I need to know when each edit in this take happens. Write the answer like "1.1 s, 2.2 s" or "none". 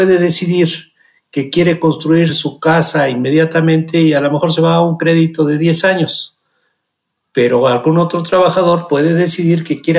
none